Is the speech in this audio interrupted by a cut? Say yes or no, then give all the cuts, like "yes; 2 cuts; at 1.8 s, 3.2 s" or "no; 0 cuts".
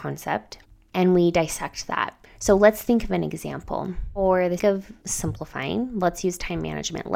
yes; 2 cuts; at 2.3 s, 4.6 s